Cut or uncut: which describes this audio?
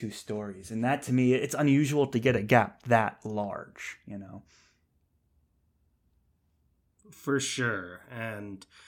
uncut